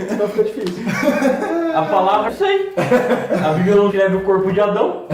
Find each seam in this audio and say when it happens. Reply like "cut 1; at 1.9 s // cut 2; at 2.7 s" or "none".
cut 1; at 2.3 s // cut 2; at 3.9 s

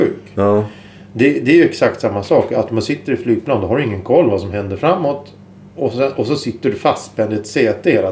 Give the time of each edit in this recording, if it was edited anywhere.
none

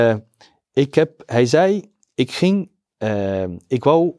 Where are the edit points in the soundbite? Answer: none

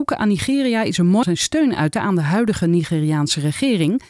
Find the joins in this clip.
cut 1; at 1.2 s // cut 2; at 1.9 s

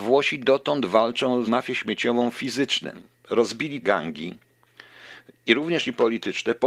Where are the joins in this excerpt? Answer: cut 1; at 1.5 s // cut 2; at 2.3 s // cut 3; at 3.8 s

